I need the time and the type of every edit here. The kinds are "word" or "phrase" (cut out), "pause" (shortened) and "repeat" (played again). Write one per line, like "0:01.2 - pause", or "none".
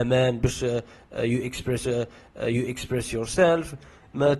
0:01.8 - repeat